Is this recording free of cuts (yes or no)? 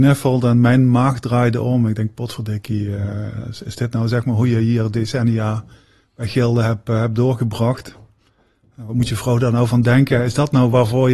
yes